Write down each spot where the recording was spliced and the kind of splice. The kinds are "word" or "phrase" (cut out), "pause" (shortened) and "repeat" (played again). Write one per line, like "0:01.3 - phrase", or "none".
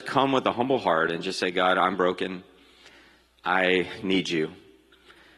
none